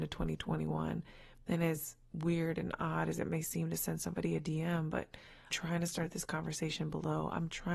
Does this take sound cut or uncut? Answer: cut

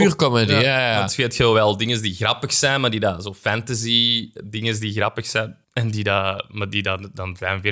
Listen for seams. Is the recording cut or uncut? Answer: cut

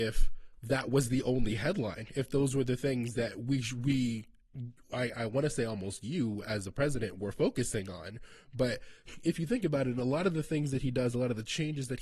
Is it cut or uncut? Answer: uncut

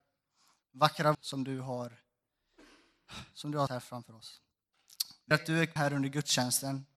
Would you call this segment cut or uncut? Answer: cut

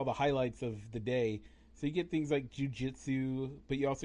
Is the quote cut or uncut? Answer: uncut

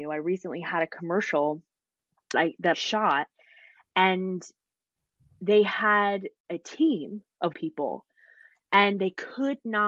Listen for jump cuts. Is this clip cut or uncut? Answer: cut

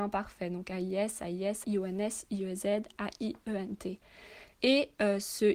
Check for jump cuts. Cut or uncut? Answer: cut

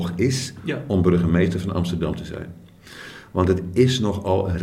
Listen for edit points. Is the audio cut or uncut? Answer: uncut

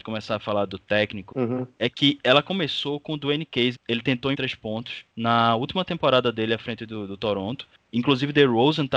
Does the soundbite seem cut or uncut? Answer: cut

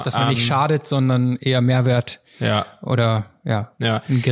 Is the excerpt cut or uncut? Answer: uncut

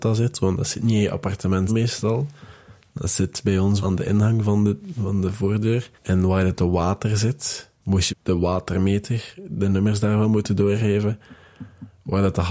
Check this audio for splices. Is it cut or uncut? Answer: cut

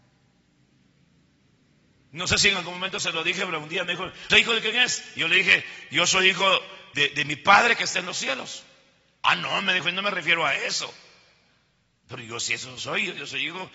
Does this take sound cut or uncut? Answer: cut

